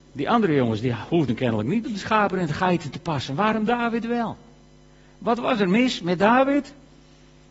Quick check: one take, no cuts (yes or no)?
yes